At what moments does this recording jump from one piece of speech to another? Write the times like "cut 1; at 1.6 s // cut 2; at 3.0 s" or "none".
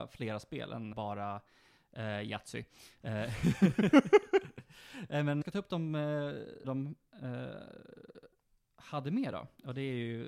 cut 1; at 0.9 s // cut 2; at 5.4 s // cut 3; at 6.6 s